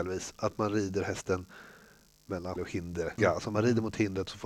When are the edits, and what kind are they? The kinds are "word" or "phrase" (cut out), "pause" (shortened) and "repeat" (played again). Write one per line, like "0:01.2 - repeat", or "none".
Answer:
0:02.6 - word
0:03.2 - word